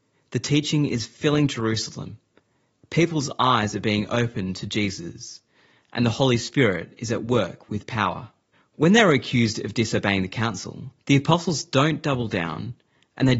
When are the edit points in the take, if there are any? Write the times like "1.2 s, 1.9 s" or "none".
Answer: 8.5 s, 11.0 s